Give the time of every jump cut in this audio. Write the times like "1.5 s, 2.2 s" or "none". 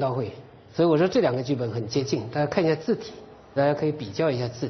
3.6 s